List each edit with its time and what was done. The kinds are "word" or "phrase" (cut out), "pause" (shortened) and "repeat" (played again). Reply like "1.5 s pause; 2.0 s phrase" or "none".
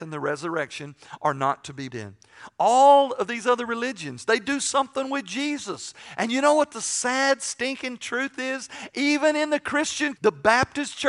1.9 s word; 10.2 s word